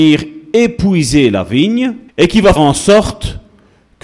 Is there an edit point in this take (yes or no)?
yes